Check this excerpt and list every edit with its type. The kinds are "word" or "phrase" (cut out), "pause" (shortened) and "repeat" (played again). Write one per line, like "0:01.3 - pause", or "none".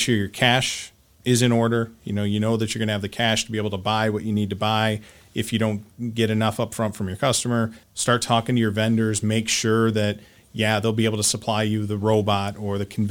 0:07.8 - pause